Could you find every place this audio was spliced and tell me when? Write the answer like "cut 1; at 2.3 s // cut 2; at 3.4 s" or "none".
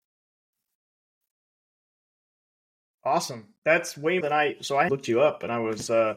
cut 1; at 3.6 s // cut 2; at 4.2 s // cut 3; at 4.9 s